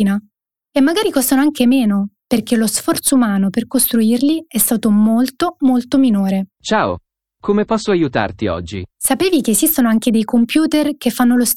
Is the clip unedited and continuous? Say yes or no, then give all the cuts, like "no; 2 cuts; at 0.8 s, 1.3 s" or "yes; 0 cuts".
no; 2 cuts; at 6.5 s, 8.9 s